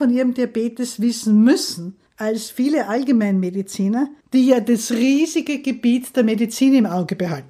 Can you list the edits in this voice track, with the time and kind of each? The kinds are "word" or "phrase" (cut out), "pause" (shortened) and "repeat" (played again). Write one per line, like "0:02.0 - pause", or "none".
0:02.1 - pause
0:04.2 - pause